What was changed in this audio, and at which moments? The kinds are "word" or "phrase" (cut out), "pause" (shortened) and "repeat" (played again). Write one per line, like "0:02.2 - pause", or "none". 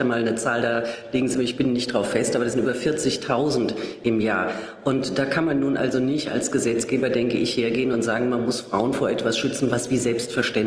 none